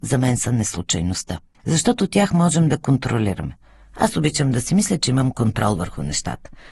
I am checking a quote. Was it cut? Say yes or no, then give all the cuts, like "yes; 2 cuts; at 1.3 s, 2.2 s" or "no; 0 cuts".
yes; 1 cut; at 1.5 s